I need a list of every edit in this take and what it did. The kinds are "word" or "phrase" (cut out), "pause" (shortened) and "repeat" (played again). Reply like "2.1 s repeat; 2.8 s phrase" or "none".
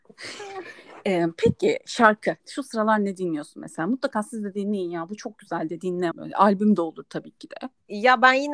2.4 s pause; 6.1 s word